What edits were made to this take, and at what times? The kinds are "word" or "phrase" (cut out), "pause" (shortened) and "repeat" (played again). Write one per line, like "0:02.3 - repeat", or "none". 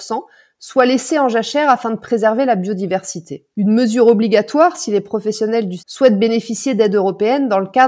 0:03.5 - pause
0:05.8 - word